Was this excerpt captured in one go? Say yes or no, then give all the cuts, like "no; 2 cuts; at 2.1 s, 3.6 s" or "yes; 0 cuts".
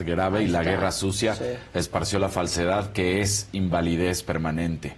yes; 0 cuts